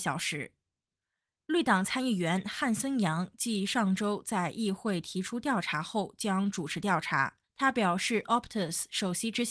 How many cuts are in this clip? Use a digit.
1